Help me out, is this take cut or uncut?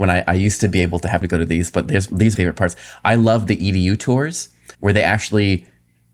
cut